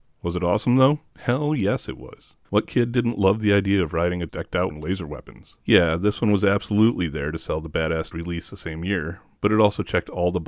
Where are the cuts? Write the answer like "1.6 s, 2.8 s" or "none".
1.1 s, 2.4 s, 4.3 s, 4.7 s, 5.6 s, 8.1 s